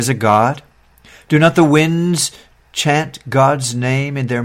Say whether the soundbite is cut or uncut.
uncut